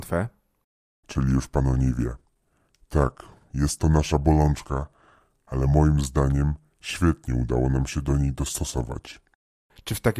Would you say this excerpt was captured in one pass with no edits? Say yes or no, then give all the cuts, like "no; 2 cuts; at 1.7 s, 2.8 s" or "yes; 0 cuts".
yes; 0 cuts